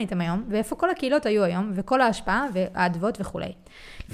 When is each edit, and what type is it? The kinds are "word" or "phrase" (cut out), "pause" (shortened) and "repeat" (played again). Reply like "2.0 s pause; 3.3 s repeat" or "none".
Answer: none

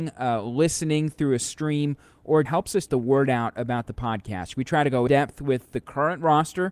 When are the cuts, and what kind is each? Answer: 2.5 s word; 2.9 s word; 5.1 s word

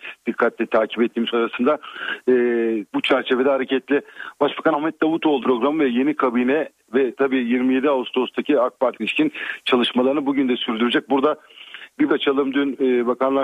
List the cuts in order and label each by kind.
1.3 s word; 2.9 s word; 4.7 s word; 5.4 s word; 9.0 s word; 12.1 s word

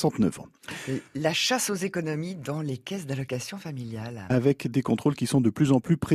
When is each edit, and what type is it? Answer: 1.1 s pause

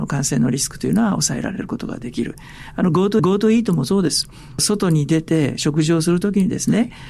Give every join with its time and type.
3.2 s repeat

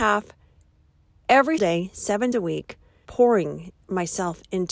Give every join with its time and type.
1.6 s word; 2.3 s word; 3.0 s word

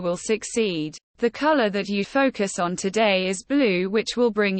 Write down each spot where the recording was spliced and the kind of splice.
1.1 s pause; 2.0 s word

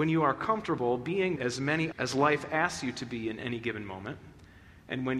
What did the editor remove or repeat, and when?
1.4 s word; 1.9 s word

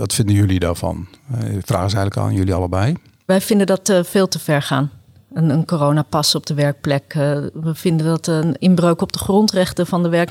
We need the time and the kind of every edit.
none

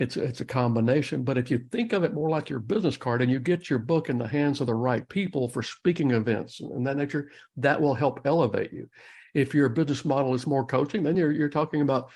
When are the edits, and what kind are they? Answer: none

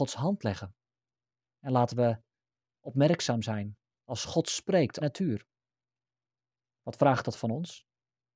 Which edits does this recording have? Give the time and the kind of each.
3.9 s pause; 5.0 s phrase

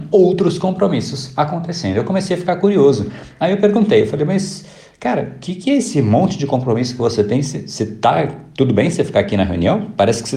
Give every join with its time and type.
none

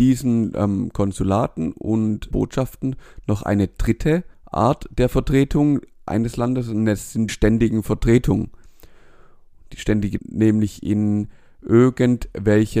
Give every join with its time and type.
2.3 s word; 4.3 s pause; 7.3 s word; 10.2 s phrase

